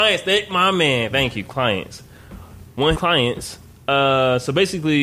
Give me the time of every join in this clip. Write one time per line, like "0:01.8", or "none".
0:02.9